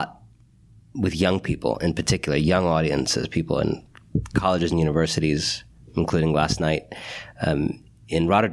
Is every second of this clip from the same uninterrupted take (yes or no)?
yes